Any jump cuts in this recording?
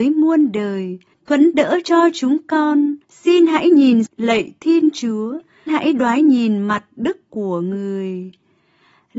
yes; 5 cuts; at 1.1 s, 3.0 s, 4.1 s, 5.7 s, 7.3 s

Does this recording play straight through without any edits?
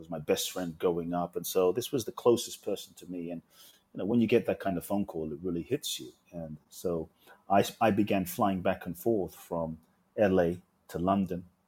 yes; 0 cuts

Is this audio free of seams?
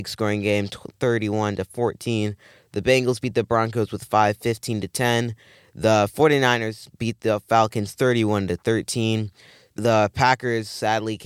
yes; 0 cuts

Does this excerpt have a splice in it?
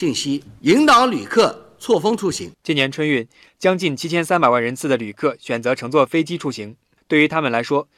yes; 1 cut; at 2.5 s

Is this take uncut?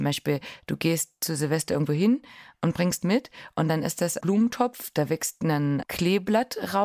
no; 3 cuts; at 3.0 s, 4.2 s, 5.8 s

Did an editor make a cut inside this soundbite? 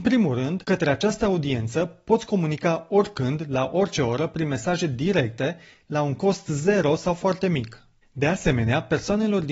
no; 0 cuts

